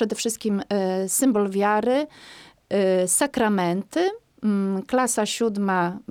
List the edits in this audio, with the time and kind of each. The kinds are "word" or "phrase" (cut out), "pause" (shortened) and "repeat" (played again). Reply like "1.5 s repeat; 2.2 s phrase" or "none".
none